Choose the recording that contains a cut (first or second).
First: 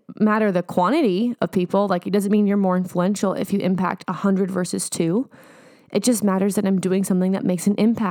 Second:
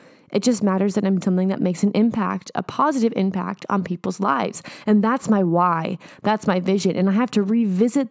second